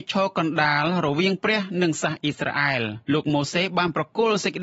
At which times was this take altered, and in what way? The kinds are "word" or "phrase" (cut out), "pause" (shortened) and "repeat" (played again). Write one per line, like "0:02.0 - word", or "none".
0:03.0 - pause